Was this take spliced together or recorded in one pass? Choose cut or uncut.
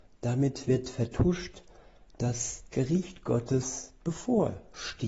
cut